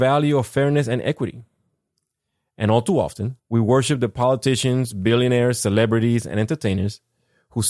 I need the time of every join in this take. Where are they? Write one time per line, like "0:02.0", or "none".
0:03.4